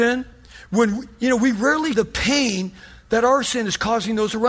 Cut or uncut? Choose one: cut